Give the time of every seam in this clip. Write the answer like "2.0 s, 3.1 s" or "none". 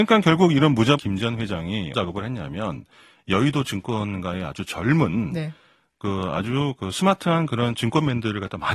1.0 s, 1.9 s